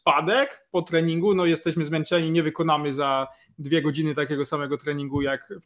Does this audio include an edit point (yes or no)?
no